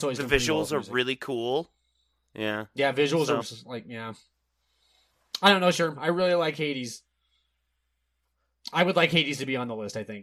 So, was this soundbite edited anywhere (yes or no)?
yes